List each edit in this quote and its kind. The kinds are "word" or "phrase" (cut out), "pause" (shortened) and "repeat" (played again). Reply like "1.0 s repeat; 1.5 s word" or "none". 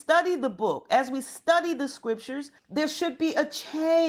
2.6 s pause